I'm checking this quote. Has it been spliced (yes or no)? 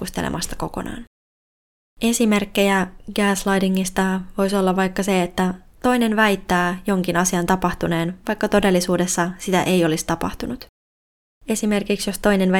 no